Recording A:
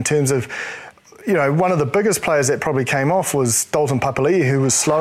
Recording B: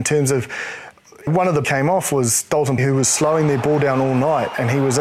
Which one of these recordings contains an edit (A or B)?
B